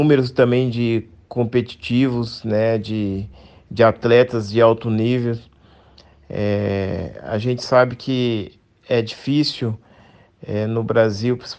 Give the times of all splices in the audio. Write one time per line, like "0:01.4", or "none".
none